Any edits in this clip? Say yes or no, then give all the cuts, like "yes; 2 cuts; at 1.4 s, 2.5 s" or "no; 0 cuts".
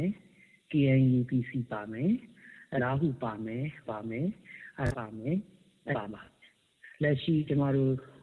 yes; 5 cuts; at 1.3 s, 2.8 s, 3.8 s, 4.9 s, 5.9 s